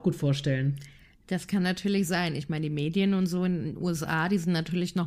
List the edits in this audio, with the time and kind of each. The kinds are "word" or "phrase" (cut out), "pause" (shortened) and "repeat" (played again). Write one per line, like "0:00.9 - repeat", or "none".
none